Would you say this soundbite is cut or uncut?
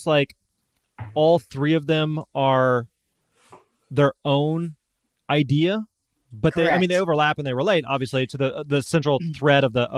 uncut